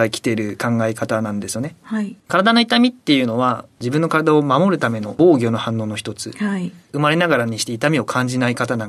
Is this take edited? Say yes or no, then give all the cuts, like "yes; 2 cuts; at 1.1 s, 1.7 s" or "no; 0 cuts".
yes; 1 cut; at 2.2 s